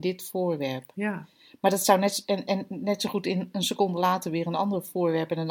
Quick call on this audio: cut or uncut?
uncut